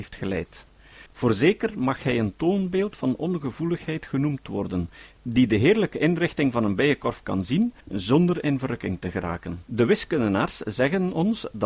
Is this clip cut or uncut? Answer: cut